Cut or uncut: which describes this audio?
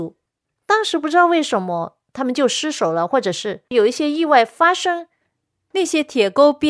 uncut